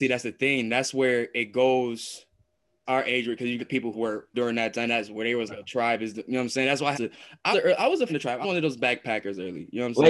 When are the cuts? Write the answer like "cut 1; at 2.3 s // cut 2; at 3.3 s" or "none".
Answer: cut 1; at 2.9 s // cut 2; at 3.6 s // cut 3; at 3.9 s // cut 4; at 4.3 s // cut 5; at 5.5 s // cut 6; at 6.9 s // cut 7; at 7.5 s // cut 8; at 8.1 s // cut 9; at 8.4 s